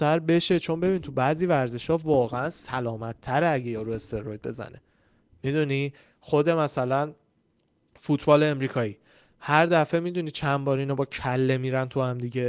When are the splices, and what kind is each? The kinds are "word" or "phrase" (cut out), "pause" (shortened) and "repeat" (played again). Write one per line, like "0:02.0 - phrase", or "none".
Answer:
none